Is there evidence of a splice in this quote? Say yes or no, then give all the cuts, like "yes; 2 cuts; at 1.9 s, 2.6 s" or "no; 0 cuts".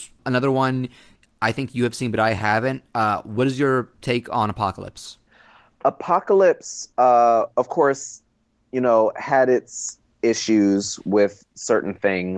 no; 0 cuts